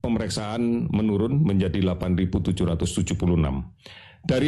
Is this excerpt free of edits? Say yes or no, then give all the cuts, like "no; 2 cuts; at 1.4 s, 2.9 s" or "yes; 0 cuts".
yes; 0 cuts